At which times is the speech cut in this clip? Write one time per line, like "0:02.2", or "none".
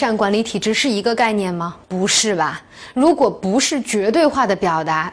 0:01.8